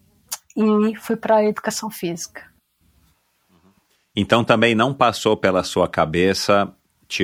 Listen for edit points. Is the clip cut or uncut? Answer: uncut